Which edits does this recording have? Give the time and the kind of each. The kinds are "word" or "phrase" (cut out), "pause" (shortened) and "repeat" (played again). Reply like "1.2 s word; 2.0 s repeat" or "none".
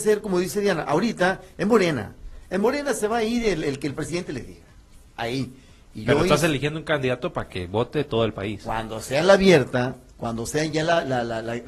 none